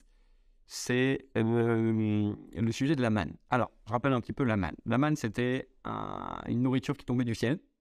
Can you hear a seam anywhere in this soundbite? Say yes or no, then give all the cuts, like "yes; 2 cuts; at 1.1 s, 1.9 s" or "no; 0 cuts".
no; 0 cuts